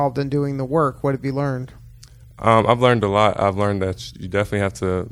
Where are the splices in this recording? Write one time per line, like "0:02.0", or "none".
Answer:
none